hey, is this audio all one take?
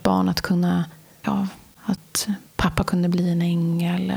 no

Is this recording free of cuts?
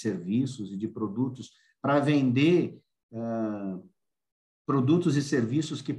yes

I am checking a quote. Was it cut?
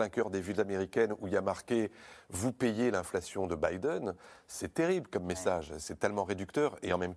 no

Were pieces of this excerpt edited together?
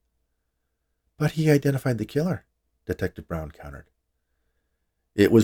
no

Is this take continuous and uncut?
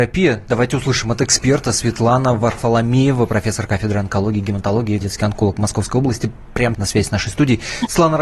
no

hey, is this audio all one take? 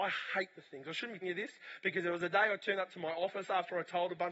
no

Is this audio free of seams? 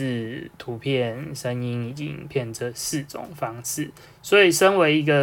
no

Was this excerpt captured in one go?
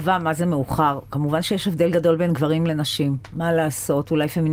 yes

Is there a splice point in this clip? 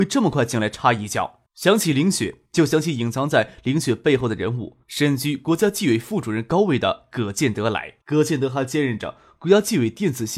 yes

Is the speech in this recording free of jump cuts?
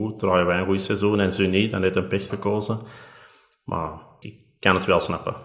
no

